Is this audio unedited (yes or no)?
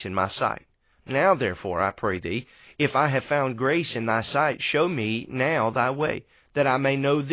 yes